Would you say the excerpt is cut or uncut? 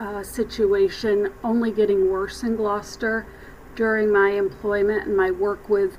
uncut